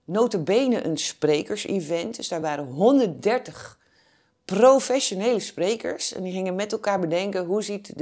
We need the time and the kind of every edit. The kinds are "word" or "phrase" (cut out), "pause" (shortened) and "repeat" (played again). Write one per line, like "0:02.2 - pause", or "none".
none